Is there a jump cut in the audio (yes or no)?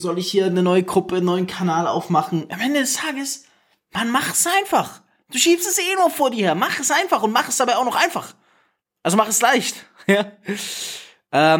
no